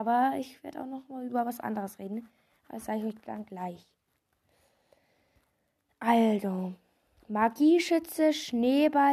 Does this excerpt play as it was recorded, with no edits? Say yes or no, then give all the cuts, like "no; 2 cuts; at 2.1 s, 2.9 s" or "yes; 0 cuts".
yes; 0 cuts